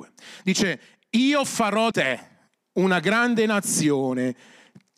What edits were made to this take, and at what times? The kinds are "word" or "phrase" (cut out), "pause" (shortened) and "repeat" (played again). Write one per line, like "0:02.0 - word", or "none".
0:01.9 - word